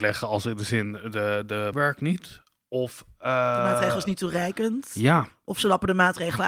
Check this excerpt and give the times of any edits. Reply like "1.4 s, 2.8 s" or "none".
1.7 s

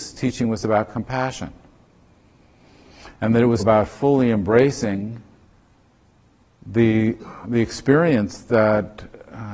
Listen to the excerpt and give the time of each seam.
3.6 s, 7.4 s

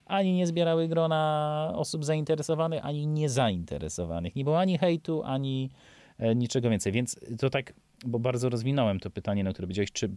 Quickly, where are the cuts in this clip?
none

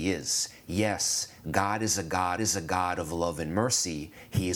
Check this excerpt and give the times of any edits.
2.4 s

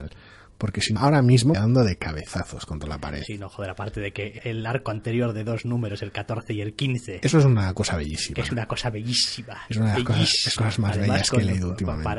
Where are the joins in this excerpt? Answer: 1.0 s, 1.5 s, 4.4 s, 10.6 s

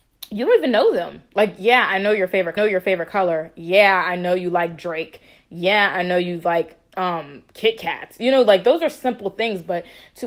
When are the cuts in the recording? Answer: 2.6 s

